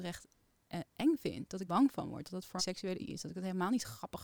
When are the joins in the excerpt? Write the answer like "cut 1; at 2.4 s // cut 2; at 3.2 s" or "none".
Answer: cut 1; at 1.7 s // cut 2; at 2.6 s // cut 3; at 3.0 s